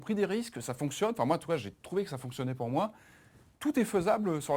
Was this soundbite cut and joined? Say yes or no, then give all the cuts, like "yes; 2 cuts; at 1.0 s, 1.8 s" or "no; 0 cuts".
no; 0 cuts